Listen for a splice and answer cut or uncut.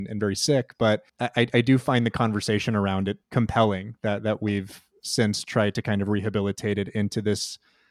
cut